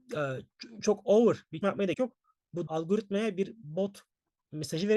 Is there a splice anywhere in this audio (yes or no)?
yes